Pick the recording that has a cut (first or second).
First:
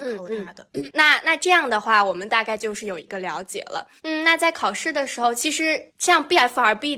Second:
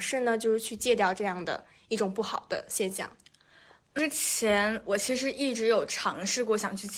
first